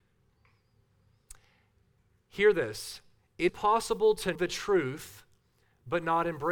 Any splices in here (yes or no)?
yes